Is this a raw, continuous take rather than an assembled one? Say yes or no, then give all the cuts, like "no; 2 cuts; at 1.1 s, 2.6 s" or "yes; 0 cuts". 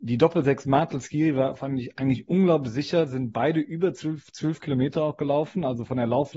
yes; 0 cuts